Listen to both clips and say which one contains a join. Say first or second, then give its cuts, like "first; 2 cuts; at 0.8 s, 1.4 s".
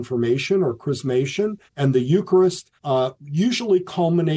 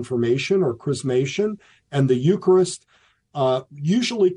first; 2 cuts; at 1.7 s, 2.8 s